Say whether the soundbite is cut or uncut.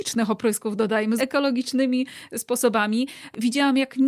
cut